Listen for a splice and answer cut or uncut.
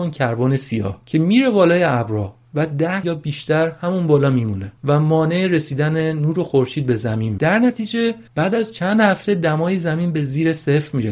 cut